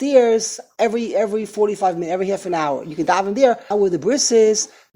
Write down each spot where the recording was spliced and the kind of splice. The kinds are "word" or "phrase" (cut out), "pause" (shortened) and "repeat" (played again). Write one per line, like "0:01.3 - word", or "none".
0:03.7 - phrase